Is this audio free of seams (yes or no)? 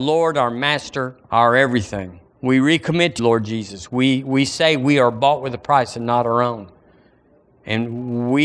no